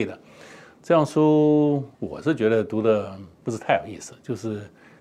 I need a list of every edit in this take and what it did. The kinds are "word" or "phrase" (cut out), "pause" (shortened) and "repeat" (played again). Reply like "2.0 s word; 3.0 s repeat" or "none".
1.9 s pause; 3.3 s pause